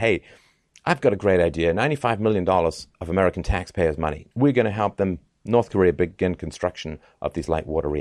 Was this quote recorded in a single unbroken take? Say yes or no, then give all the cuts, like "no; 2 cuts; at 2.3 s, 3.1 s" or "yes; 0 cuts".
no; 2 cuts; at 2.9 s, 4.3 s